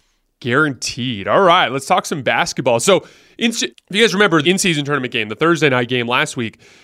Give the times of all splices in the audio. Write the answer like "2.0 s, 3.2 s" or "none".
3.7 s, 4.4 s